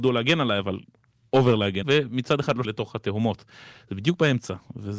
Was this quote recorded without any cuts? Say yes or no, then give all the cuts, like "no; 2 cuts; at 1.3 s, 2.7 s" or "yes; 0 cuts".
no; 2 cuts; at 1.8 s, 2.6 s